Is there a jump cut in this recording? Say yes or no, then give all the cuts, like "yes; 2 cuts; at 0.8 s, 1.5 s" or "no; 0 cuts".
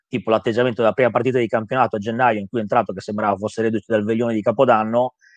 no; 0 cuts